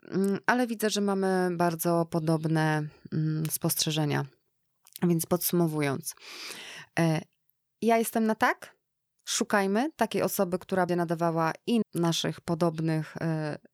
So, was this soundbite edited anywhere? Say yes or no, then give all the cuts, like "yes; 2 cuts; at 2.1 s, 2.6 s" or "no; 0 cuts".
yes; 2 cuts; at 10.9 s, 11.8 s